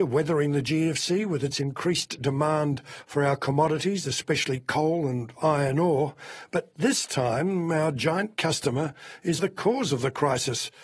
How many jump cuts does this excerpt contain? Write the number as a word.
one